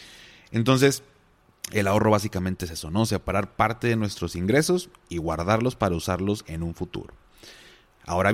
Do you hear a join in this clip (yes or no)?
no